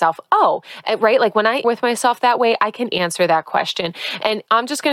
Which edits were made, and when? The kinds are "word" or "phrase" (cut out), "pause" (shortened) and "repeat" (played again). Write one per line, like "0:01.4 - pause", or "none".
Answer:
0:01.6 - word
0:02.9 - word